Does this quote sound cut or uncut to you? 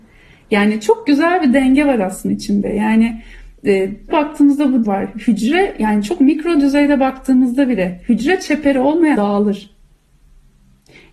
cut